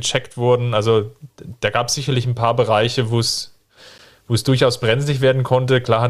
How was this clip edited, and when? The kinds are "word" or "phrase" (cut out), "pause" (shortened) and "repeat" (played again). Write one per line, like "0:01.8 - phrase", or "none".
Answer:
none